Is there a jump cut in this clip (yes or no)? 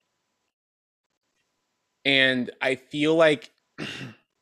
no